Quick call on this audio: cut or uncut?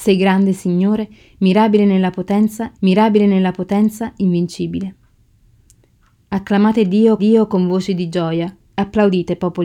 cut